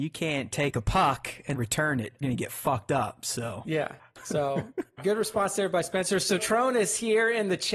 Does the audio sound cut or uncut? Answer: cut